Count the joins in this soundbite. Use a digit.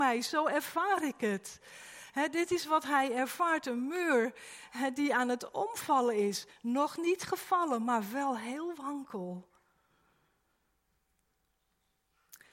0